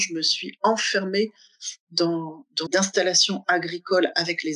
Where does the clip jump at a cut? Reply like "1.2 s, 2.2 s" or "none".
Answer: 2.7 s

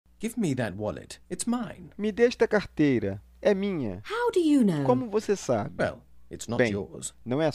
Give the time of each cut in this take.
1.2 s

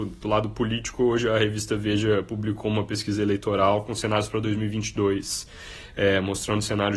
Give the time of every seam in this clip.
none

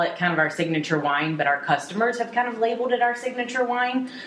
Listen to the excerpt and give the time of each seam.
none

